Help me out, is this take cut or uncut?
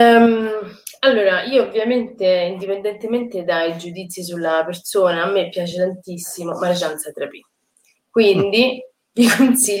uncut